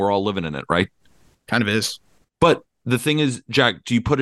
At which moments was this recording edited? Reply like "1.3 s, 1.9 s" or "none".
none